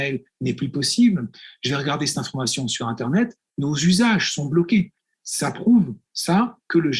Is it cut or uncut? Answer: uncut